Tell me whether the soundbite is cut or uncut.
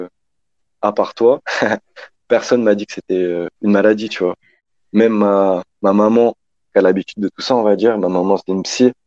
cut